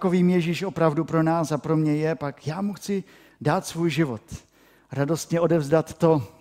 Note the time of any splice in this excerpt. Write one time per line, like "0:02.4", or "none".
none